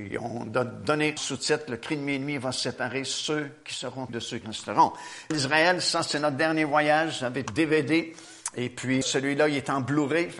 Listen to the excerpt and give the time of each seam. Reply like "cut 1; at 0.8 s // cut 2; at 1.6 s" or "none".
cut 1; at 1.2 s // cut 2; at 4.1 s // cut 3; at 4.4 s // cut 4; at 5.3 s // cut 5; at 7.5 s // cut 6; at 9.0 s